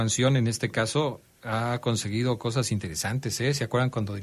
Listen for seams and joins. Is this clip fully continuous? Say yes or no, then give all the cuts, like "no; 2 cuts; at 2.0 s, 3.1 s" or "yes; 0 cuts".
yes; 0 cuts